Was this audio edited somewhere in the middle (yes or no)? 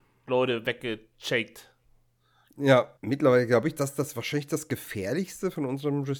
yes